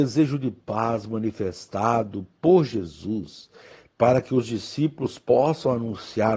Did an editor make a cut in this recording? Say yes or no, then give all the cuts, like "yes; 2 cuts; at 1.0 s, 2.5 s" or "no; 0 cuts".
no; 0 cuts